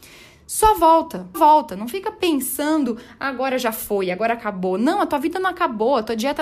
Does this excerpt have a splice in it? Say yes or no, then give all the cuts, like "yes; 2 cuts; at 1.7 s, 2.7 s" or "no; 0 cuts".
yes; 1 cut; at 1.3 s